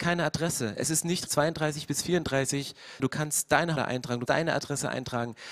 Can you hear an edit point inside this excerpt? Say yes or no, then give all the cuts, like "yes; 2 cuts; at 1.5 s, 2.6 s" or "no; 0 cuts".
yes; 4 cuts; at 1.3 s, 3.0 s, 3.8 s, 4.3 s